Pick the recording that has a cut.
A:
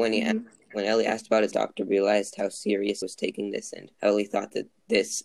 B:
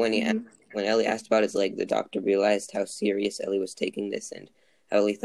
A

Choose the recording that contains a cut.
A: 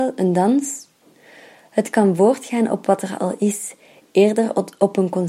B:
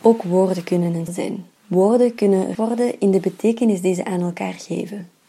B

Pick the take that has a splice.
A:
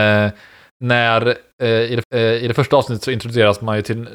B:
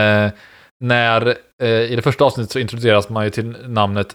A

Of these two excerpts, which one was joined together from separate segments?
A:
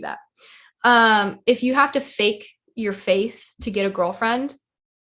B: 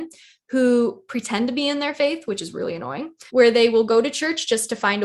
B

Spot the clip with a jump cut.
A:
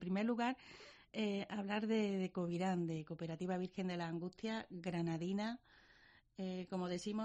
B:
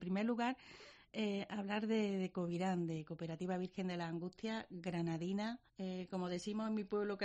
B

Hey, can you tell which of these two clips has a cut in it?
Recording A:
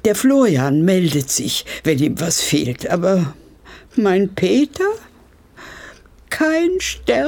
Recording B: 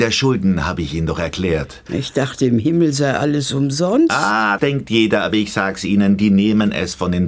B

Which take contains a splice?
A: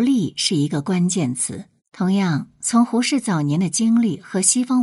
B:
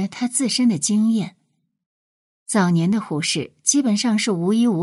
A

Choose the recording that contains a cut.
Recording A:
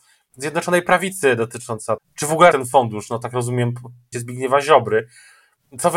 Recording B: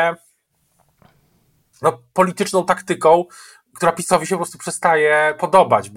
A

